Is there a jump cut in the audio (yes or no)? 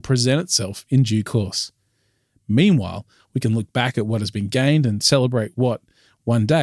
no